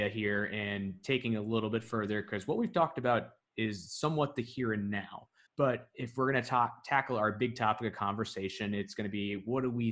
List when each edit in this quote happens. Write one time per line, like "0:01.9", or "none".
0:05.5